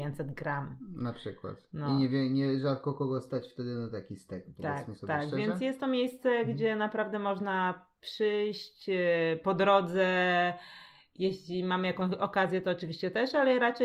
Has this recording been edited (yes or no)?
no